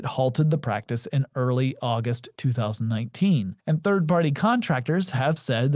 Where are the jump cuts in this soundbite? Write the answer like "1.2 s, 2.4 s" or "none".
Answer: 3.6 s